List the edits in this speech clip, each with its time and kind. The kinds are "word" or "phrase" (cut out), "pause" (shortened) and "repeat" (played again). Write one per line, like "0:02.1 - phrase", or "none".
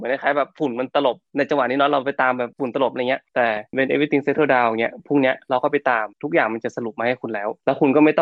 0:06.1 - pause